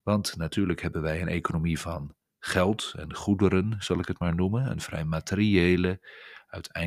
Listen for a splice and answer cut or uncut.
uncut